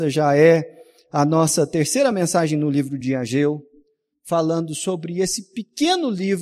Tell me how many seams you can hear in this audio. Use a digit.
0